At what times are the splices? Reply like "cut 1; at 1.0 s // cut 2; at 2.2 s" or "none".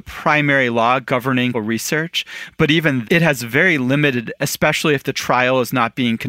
cut 1; at 1.5 s // cut 2; at 3.0 s // cut 3; at 4.4 s